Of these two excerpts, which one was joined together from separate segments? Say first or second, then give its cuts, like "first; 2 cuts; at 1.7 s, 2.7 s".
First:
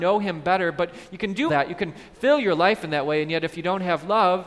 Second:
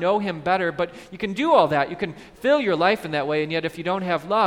first; 1 cut; at 1.5 s